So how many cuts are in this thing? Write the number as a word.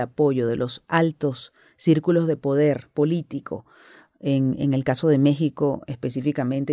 zero